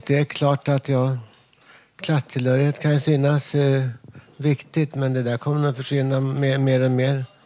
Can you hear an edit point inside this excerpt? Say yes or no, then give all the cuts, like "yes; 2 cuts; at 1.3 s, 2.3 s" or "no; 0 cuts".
no; 0 cuts